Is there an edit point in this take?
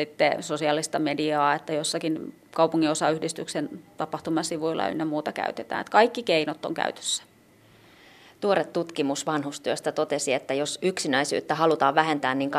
no; 0 cuts

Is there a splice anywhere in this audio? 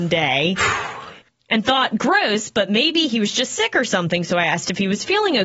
no; 0 cuts

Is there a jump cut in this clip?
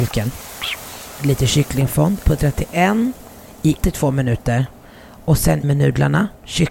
yes; 3 cuts; at 2.2 s, 3.8 s, 5.6 s

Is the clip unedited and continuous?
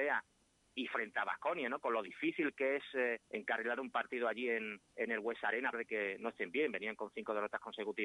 no; 3 cuts; at 3.2 s, 4.9 s, 5.7 s

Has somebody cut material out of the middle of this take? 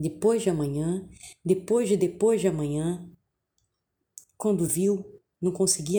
no; 0 cuts

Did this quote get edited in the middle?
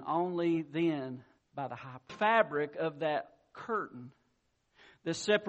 yes; 2 cuts; at 1.4 s, 2.1 s

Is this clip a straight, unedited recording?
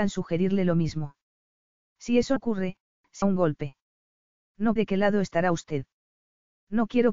no; 3 cuts; at 2.4 s, 3.2 s, 4.8 s

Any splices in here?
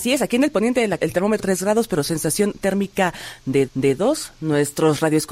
yes; 3 cuts; at 1.0 s, 1.4 s, 3.7 s

